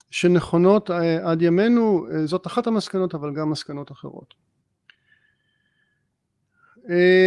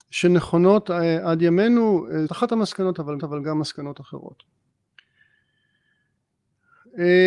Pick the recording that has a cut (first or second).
second